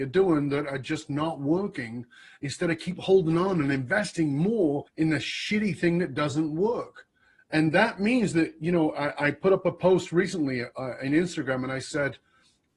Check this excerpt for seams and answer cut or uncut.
cut